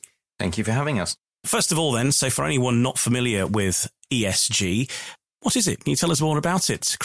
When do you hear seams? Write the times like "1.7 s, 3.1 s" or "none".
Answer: none